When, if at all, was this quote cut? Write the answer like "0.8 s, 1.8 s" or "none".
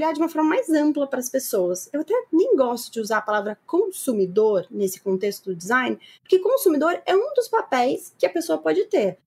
none